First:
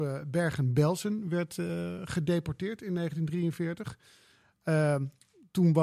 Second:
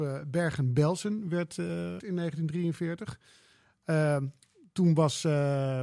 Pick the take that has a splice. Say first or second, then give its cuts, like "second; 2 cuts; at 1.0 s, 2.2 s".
second; 1 cut; at 2.0 s